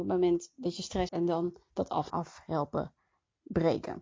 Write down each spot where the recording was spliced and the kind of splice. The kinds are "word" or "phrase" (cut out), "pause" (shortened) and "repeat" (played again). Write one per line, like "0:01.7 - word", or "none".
0:01.1 - word
0:02.1 - word